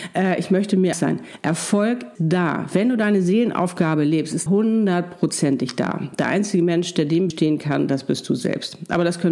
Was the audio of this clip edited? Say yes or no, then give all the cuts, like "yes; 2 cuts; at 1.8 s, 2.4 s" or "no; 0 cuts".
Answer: yes; 4 cuts; at 0.9 s, 2.1 s, 4.5 s, 7.3 s